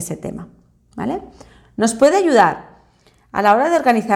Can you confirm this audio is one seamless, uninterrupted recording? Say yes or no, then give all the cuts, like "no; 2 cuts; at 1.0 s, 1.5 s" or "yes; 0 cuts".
yes; 0 cuts